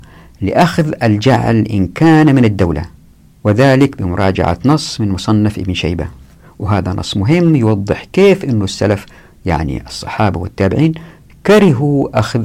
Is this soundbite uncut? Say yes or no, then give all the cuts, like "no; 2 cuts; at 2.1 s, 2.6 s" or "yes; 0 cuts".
yes; 0 cuts